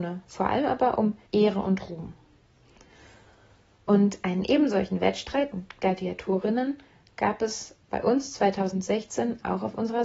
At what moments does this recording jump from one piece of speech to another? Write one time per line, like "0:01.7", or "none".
0:01.3
0:05.5
0:07.8